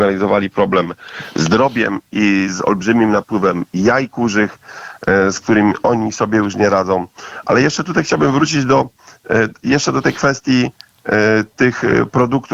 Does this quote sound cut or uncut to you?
uncut